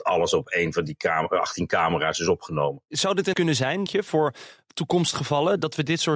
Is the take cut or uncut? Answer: cut